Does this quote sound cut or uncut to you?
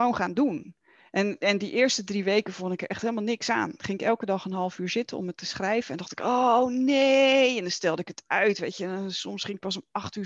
uncut